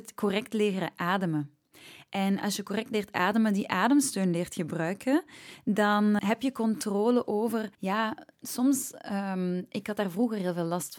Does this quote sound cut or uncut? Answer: cut